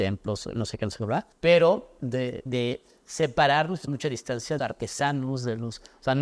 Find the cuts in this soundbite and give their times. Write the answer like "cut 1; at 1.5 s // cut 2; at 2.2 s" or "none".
cut 1; at 1.3 s // cut 2; at 2.5 s // cut 3; at 3.9 s // cut 4; at 4.6 s